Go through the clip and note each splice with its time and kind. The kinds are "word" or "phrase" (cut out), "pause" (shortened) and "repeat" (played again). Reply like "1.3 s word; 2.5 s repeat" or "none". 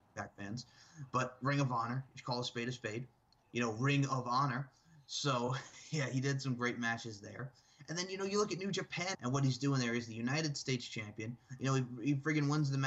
9.1 s word